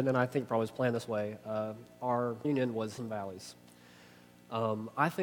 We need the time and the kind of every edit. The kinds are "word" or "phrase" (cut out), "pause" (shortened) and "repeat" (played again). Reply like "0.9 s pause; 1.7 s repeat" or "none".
2.4 s word; 3.0 s word